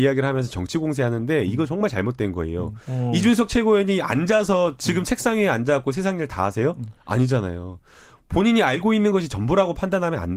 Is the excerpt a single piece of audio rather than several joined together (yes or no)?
yes